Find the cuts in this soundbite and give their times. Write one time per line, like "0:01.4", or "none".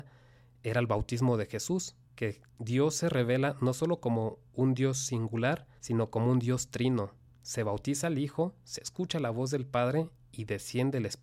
0:02.0
0:05.8
0:07.3

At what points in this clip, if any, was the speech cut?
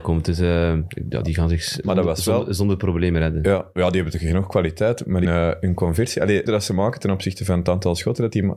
0:01.2
0:05.2
0:06.5

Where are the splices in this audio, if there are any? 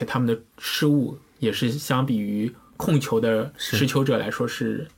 none

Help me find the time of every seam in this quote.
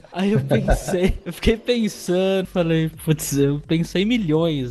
0:02.4

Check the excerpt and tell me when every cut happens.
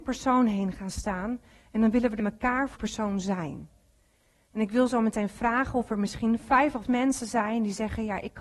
0:02.2
0:02.8
0:06.8

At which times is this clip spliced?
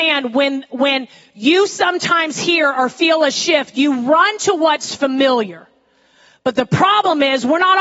none

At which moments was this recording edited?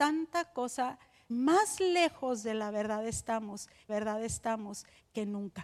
0:01.3
0:03.9

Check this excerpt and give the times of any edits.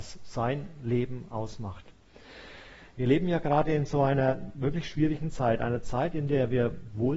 none

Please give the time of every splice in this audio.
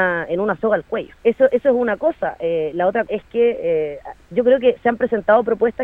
0:01.2
0:03.1

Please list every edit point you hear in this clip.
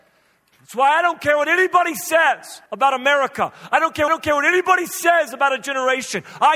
0:02.7
0:04.1

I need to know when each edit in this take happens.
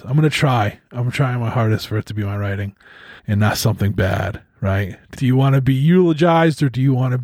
0:03.2
0:05.1

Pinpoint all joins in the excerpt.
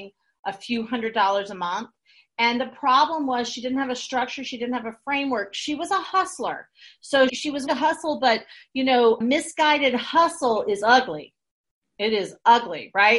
0:07.3
0:07.7
0:09.2

